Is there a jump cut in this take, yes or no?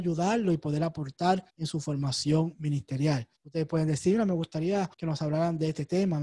yes